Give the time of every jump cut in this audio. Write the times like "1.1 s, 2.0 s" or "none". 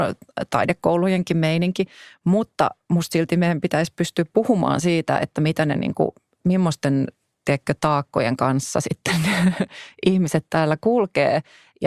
none